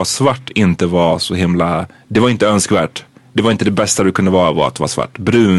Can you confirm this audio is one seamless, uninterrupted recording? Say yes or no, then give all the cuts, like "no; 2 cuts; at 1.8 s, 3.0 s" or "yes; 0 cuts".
yes; 0 cuts